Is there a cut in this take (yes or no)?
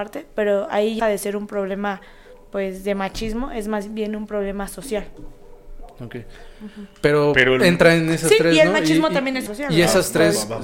yes